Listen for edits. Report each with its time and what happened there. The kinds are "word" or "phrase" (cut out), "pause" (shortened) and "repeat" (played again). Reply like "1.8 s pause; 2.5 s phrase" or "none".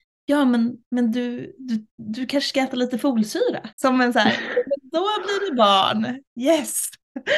3.7 s pause

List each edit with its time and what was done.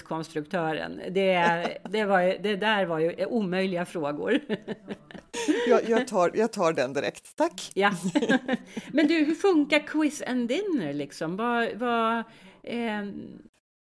none

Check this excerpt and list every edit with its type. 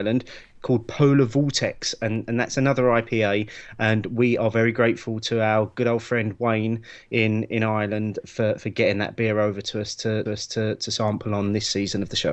10.3 s repeat

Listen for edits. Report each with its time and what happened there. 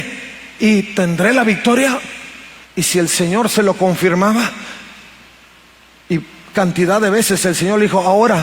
2.6 s pause

